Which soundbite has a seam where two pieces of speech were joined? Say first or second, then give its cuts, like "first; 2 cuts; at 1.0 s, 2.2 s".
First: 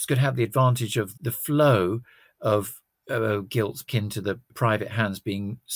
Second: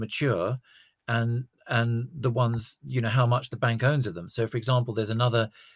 first; 4 cuts; at 1.1 s, 2.9 s, 3.9 s, 4.5 s